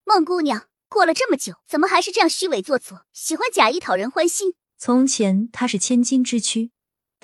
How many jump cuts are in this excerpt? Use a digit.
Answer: 3